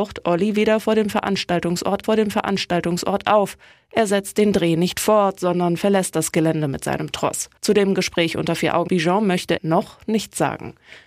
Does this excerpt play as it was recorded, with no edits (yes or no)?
no